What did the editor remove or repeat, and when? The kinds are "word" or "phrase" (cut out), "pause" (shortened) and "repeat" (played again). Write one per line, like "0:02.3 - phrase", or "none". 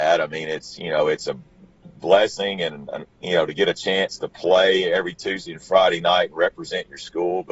0:03.1 - pause